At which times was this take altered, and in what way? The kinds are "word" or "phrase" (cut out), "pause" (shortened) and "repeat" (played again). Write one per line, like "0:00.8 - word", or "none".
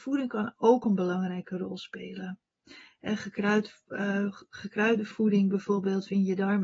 none